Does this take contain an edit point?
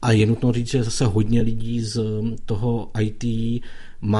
no; 0 cuts

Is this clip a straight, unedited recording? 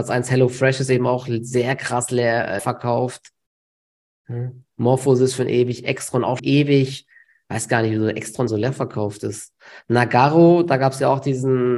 no; 3 cuts; at 2.6 s, 6.4 s, 8.5 s

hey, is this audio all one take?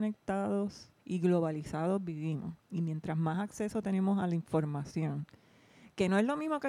no; 2 cuts; at 1.0 s, 2.6 s

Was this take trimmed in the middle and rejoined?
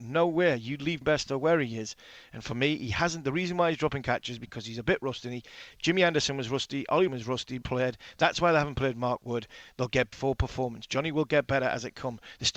yes; 4 cuts; at 1.0 s, 7.1 s, 7.6 s, 10.1 s

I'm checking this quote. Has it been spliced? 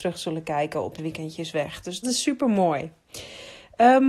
yes; 2 cuts; at 1.0 s, 2.0 s

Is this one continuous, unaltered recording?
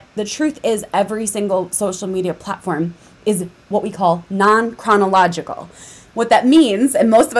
yes; 0 cuts

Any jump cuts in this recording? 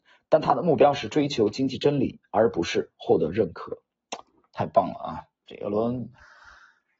no; 0 cuts

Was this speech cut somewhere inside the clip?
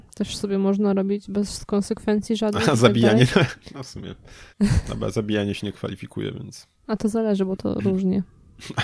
yes; 2 cuts; at 4.5 s, 6.7 s

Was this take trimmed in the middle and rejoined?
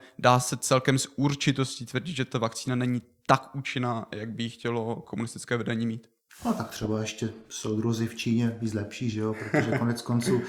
yes; 1 cut; at 6.3 s

